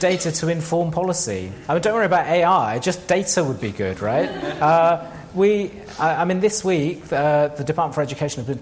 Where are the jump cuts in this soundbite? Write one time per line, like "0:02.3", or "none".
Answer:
none